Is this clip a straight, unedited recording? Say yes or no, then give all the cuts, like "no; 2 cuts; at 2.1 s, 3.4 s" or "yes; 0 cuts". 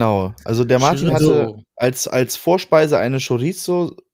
yes; 0 cuts